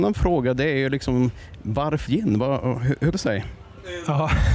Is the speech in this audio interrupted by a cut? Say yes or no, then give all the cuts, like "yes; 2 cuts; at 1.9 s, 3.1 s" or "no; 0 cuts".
yes; 2 cuts; at 2.1 s, 3.1 s